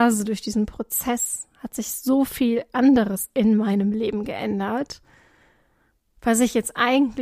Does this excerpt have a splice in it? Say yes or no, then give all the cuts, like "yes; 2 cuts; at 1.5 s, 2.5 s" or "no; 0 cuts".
no; 0 cuts